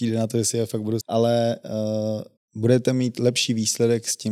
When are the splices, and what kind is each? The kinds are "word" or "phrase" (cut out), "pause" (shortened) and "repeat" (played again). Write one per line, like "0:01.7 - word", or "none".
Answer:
0:01.0 - word
0:02.4 - pause